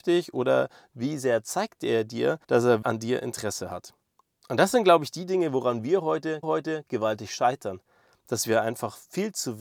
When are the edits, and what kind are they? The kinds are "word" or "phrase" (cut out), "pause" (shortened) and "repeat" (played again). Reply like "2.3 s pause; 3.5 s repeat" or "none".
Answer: 2.4 s pause; 2.8 s word; 6.4 s repeat